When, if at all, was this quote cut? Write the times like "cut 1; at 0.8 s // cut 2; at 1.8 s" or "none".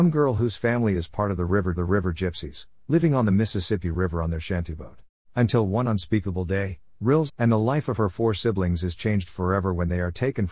cut 1; at 1.8 s // cut 2; at 5.2 s // cut 3; at 7.3 s